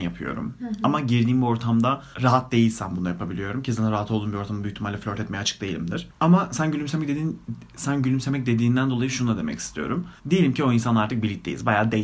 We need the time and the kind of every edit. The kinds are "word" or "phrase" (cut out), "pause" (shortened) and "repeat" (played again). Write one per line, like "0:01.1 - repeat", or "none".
0:02.1 - pause
0:10.2 - pause